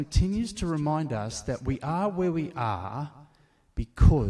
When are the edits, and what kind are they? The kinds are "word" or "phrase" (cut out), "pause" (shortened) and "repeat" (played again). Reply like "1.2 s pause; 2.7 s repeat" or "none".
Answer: none